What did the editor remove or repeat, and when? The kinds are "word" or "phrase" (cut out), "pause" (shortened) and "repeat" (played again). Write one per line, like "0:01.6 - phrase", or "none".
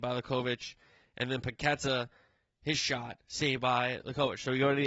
none

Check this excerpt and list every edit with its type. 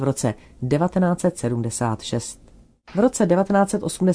none

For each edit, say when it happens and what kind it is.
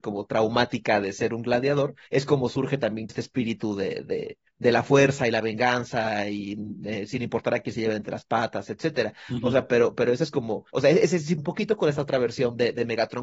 0:02.1 - pause
0:03.1 - word
0:10.7 - pause
0:11.4 - phrase

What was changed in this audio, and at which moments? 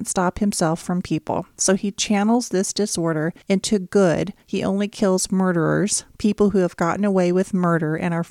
0:01.0 - word
0:03.4 - pause
0:04.4 - pause

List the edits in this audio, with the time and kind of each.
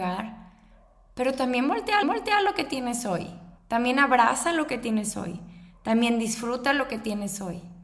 0:02.0 - repeat
0:03.6 - pause

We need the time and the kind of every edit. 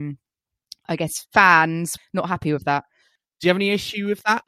0:02.0 - word

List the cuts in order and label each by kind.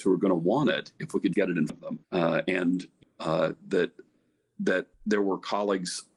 0:01.3 - word
0:01.7 - word
0:02.0 - pause
0:03.0 - word
0:04.9 - pause

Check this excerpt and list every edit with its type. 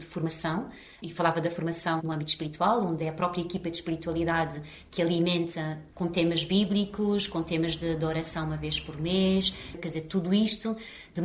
0:02.0 - word

